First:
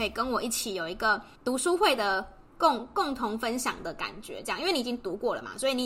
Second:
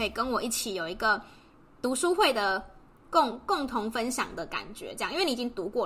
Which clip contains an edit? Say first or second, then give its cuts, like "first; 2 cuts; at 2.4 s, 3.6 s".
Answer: first; 2 cuts; at 1.4 s, 2.5 s